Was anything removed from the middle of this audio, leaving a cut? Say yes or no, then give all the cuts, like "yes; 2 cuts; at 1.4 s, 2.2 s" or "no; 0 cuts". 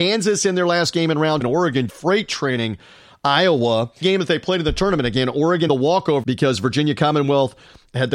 yes; 5 cuts; at 1.4 s, 1.9 s, 4.0 s, 5.7 s, 6.2 s